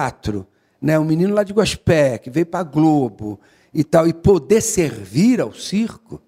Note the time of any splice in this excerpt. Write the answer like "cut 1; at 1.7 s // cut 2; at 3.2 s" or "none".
none